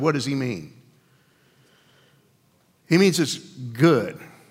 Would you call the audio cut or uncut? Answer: uncut